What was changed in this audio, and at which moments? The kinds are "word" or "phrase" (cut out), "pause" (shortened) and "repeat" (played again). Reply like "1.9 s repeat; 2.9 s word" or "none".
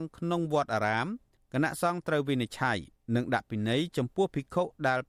none